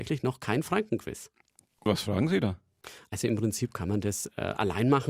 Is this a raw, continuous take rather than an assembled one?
yes; 0 cuts

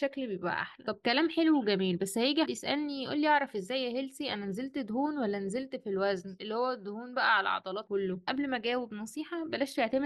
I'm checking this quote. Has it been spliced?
yes; 2 cuts; at 2.5 s, 7.9 s

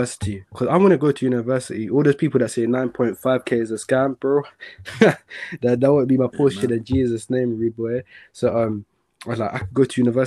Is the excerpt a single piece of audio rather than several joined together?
yes; 0 cuts

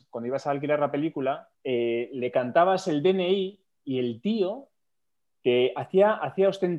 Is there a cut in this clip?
yes; 1 cut; at 1.5 s

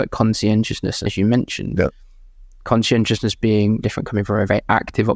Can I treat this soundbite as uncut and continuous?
no; 2 cuts; at 1.1 s, 3.8 s

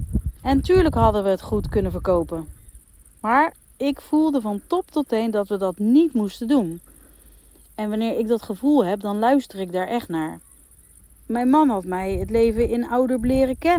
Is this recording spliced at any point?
no; 0 cuts

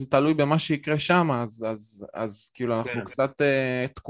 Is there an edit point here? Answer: no; 0 cuts

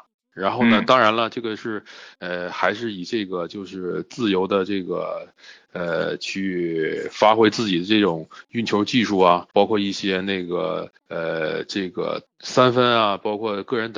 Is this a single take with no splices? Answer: no; 3 cuts; at 9.5 s, 11.0 s, 12.3 s

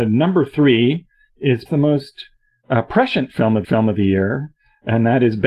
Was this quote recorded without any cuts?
no; 2 cuts; at 1.7 s, 3.6 s

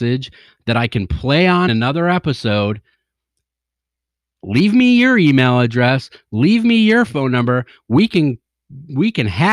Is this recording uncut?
no; 1 cut; at 1.7 s

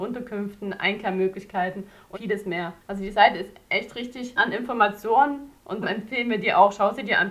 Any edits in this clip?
yes; 3 cuts; at 2.1 s, 4.4 s, 5.8 s

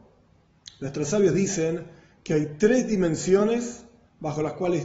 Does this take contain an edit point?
no; 0 cuts

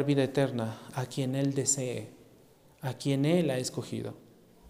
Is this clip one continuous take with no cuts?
yes; 0 cuts

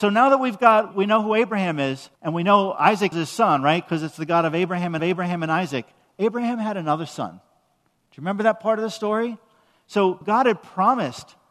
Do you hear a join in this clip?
yes; 5 cuts; at 0.9 s, 2.2 s, 3.1 s, 5.0 s, 10.2 s

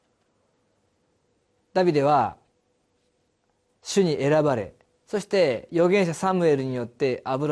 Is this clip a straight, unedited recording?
yes; 0 cuts

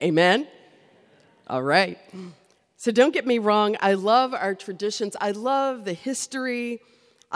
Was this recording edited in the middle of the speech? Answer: no; 0 cuts

